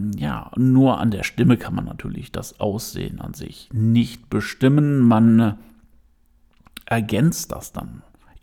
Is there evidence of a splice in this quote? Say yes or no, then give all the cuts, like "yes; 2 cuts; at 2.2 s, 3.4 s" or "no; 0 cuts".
no; 0 cuts